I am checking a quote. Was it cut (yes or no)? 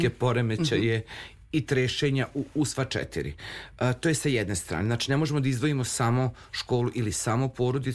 no